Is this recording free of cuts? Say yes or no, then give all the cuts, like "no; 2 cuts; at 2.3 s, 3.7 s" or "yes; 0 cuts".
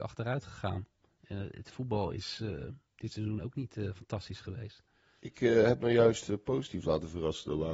yes; 0 cuts